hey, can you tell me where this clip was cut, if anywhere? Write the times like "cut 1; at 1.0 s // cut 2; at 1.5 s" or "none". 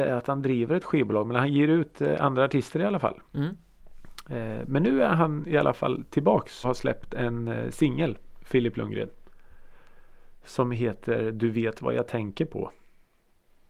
cut 1; at 3.3 s // cut 2; at 6.6 s